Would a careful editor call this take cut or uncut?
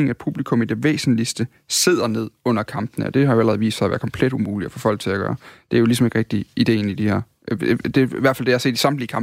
uncut